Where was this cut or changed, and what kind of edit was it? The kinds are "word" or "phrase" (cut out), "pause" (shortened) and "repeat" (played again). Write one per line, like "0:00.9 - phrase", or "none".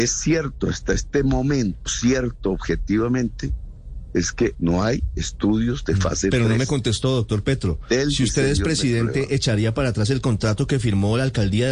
0:01.9 - word
0:04.6 - word